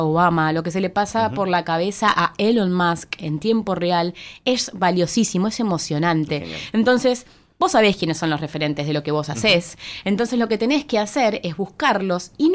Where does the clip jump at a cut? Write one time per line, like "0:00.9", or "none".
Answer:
none